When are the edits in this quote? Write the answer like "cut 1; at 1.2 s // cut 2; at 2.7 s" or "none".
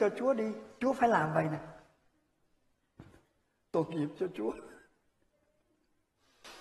none

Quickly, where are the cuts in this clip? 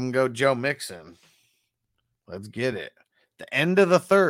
none

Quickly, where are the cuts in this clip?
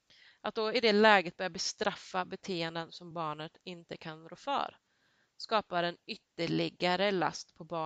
none

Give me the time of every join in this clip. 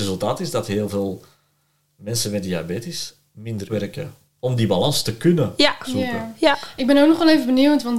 cut 1; at 3.7 s

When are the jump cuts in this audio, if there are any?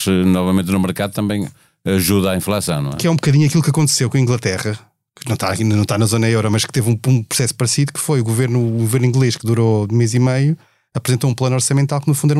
none

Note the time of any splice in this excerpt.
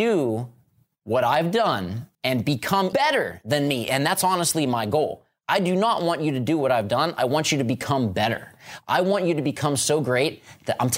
cut 1; at 2.1 s // cut 2; at 2.9 s

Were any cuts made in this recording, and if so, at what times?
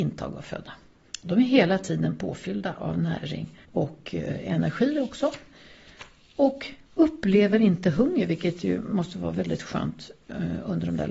cut 1; at 3.6 s // cut 2; at 6.8 s

